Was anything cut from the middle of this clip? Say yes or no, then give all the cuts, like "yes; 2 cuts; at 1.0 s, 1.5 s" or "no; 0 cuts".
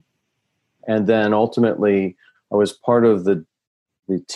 no; 0 cuts